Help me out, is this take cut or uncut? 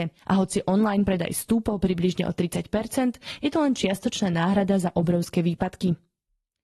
uncut